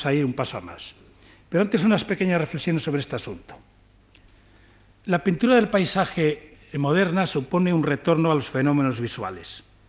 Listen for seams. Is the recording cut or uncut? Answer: uncut